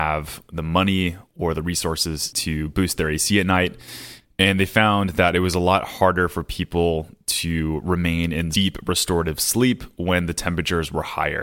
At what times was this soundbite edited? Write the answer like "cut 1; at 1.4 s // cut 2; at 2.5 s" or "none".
none